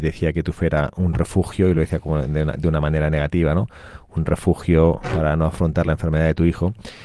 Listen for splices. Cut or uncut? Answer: uncut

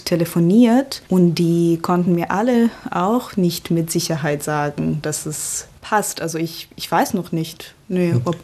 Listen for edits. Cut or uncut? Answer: uncut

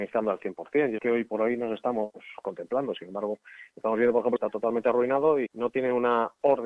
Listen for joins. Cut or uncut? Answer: cut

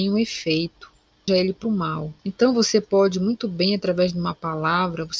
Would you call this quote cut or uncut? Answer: cut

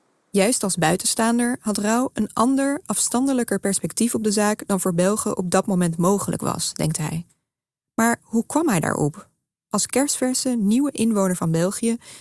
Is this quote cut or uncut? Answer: uncut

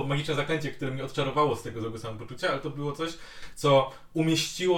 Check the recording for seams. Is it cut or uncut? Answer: uncut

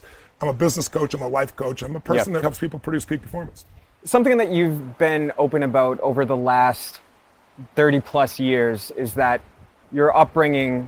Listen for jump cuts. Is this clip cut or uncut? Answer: cut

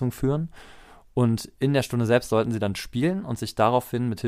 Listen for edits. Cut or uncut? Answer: uncut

